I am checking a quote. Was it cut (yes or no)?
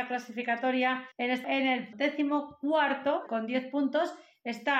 yes